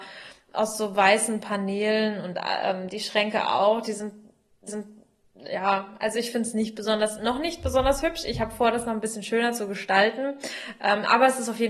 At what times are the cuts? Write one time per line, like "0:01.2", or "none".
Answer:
0:04.7

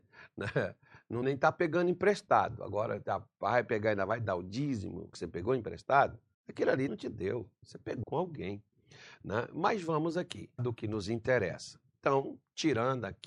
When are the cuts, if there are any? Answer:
0:01.2
0:05.1
0:06.3
0:06.9
0:08.0
0:10.6

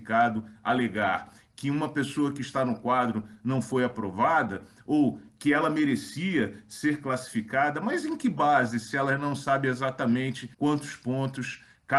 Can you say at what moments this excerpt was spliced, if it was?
0:10.5

